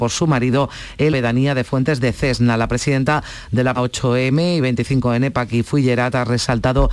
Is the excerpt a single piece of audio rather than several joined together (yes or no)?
no